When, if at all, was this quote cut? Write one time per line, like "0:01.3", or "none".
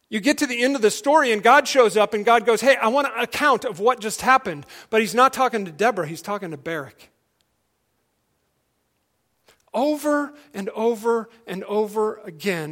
none